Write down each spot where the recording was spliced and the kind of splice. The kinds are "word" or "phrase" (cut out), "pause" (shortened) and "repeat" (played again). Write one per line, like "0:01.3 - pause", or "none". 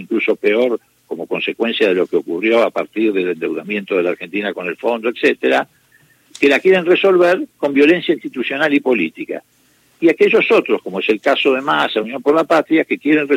none